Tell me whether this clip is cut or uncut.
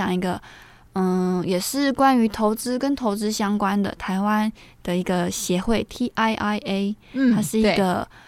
uncut